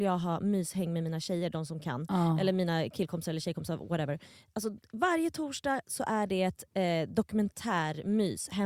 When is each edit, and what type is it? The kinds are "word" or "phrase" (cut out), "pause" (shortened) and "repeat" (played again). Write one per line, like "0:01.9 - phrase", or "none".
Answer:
none